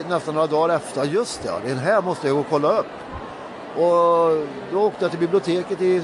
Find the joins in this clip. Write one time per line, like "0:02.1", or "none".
none